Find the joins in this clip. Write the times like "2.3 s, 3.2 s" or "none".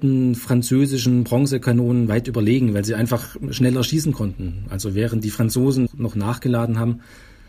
5.9 s